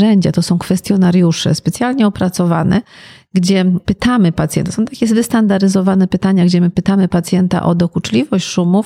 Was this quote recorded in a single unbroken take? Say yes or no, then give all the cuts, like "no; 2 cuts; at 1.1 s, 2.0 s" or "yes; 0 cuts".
yes; 0 cuts